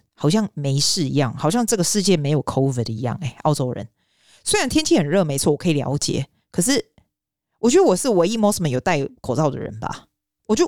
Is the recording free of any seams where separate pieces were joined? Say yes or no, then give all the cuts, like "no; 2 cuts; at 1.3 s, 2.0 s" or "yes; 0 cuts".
yes; 0 cuts